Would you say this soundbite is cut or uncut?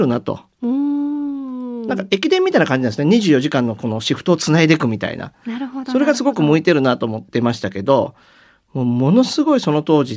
uncut